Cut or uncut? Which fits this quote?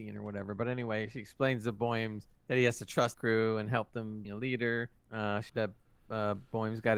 cut